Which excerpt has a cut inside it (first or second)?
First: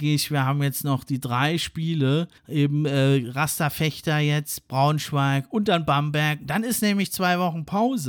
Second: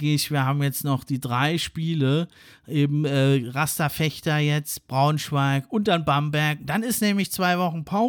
first